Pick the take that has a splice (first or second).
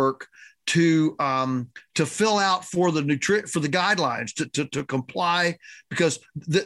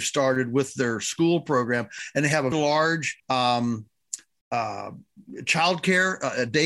second